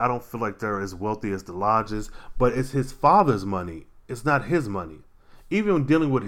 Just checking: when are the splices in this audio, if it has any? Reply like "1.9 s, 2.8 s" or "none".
none